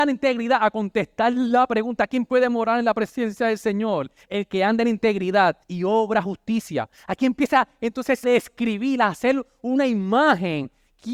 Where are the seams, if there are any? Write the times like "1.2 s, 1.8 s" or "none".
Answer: 5.6 s, 8.2 s